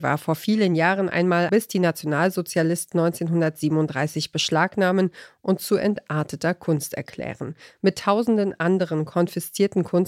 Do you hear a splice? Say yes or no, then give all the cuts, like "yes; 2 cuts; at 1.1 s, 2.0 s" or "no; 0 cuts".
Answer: yes; 2 cuts; at 1.5 s, 2.9 s